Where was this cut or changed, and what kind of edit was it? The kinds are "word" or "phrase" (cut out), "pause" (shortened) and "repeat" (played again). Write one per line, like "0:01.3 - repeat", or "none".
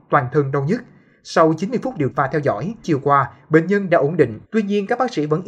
0:02.1 - word
0:02.8 - word
0:04.4 - pause